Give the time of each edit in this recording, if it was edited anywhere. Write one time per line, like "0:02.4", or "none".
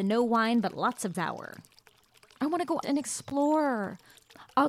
0:01.1
0:02.8